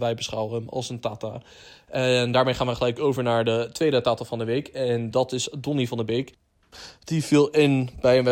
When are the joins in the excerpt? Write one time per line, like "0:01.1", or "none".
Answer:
none